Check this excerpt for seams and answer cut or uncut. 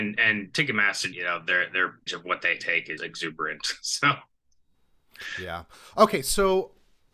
cut